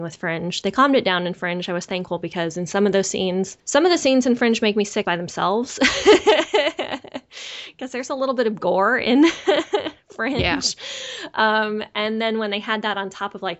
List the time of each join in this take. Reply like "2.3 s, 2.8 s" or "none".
5.0 s